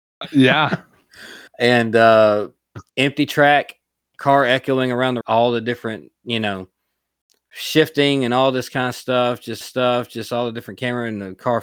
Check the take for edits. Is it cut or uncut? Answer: cut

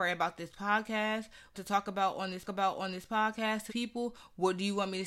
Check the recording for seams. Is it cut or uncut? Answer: cut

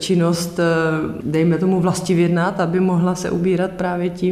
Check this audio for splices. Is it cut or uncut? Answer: uncut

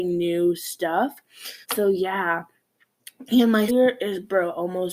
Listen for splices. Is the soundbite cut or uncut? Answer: cut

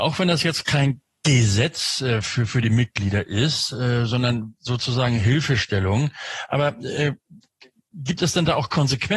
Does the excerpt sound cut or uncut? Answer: uncut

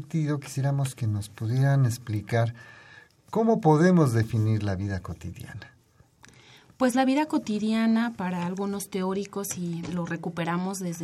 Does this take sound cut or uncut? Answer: uncut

